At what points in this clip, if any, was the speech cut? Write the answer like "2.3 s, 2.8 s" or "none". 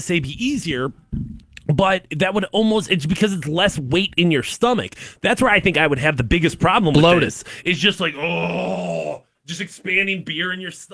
none